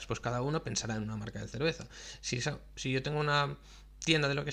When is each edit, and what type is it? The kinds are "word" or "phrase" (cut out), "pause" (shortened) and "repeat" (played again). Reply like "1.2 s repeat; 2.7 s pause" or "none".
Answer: none